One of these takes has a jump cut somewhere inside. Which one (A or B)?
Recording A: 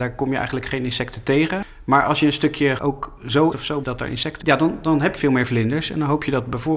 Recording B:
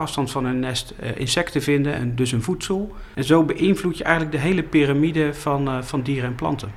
A